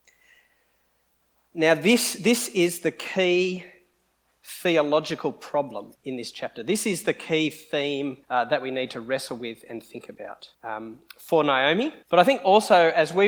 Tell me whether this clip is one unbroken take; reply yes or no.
no